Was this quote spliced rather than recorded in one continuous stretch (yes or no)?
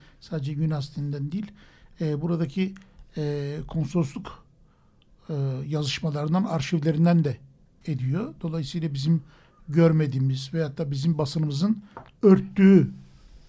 yes